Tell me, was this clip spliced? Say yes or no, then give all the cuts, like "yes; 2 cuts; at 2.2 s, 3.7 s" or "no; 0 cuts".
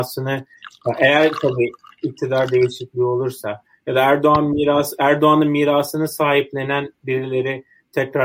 no; 0 cuts